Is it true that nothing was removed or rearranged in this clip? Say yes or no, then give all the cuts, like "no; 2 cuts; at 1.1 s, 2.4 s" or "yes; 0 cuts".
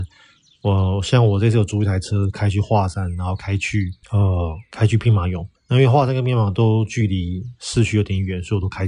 no; 2 cuts; at 4.0 s, 5.6 s